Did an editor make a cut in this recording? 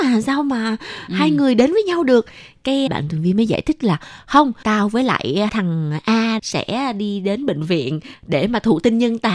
yes; 4 cuts; at 2.9 s, 4.6 s, 5.5 s, 6.4 s

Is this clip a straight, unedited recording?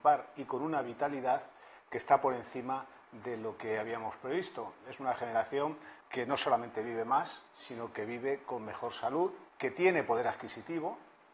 no; 2 cuts; at 6.0 s, 9.5 s

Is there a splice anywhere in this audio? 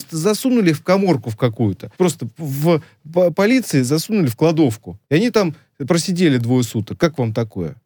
yes; 2 cuts; at 1.9 s, 5.0 s

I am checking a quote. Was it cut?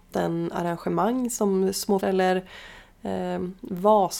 yes; 1 cut; at 2.0 s

